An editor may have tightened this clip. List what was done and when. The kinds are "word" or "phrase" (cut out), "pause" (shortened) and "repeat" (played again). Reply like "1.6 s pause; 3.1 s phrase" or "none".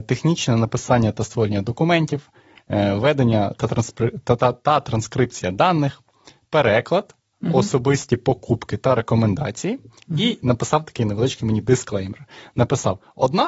none